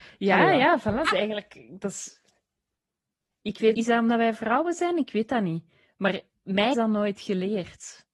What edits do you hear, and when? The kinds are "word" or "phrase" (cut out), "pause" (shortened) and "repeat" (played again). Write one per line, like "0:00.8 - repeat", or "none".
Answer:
0:01.0 - word
0:03.7 - word
0:06.7 - word